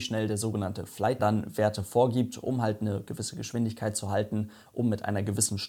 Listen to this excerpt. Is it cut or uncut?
cut